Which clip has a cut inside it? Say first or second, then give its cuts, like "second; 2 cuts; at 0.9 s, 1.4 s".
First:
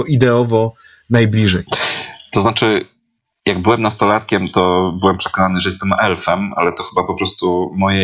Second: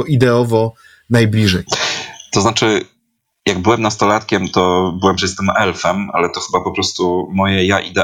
second; 1 cut; at 5.2 s